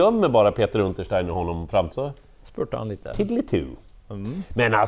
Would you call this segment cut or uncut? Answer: cut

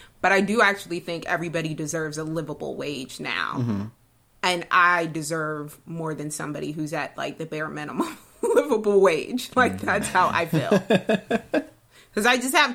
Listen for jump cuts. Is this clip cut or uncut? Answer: uncut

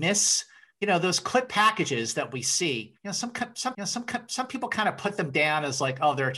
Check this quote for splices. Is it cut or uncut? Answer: cut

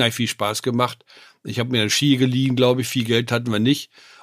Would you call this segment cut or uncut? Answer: uncut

